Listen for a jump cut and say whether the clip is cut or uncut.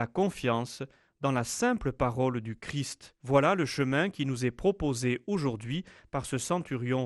cut